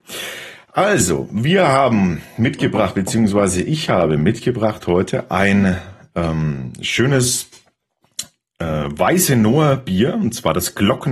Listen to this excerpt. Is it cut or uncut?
uncut